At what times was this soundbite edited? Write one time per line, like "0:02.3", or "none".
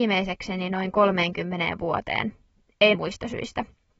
0:02.9